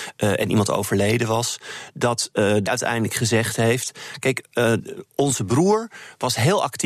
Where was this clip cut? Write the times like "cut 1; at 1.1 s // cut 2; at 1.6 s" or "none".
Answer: cut 1; at 2.7 s // cut 2; at 5.4 s